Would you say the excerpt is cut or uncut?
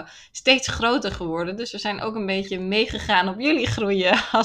uncut